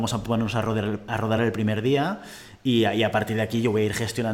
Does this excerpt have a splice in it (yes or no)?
no